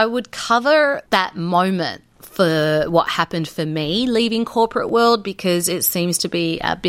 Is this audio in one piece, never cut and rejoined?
no; 1 cut; at 1.1 s

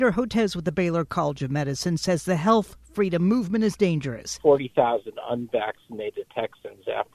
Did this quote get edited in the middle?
no; 0 cuts

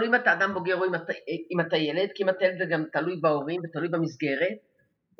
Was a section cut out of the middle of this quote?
no; 0 cuts

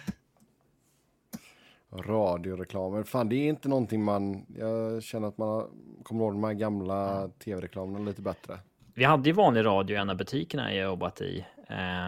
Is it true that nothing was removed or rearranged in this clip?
yes; 0 cuts

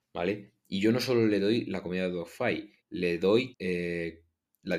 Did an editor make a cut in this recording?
yes; 2 cuts; at 2.8 s, 3.5 s

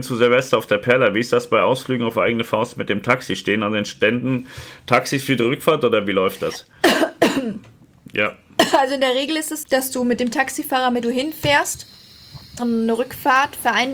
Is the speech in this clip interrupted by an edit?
yes; 3 cuts; at 9.6 s, 11.0 s, 12.6 s

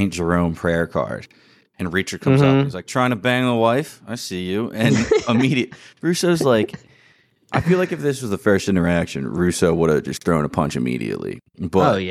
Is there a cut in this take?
no; 0 cuts

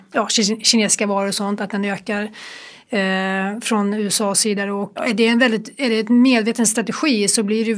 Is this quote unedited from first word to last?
no; 1 cut; at 5.0 s

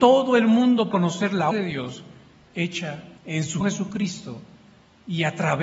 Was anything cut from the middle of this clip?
yes; 4 cuts; at 0.9 s, 1.5 s, 3.2 s, 3.6 s

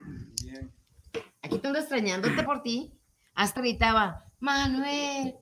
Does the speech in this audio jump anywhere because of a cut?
yes; 3 cuts; at 1.6 s, 2.5 s, 3.6 s

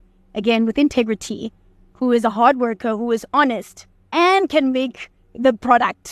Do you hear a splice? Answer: no; 0 cuts

